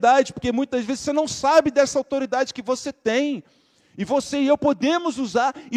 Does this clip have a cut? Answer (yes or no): no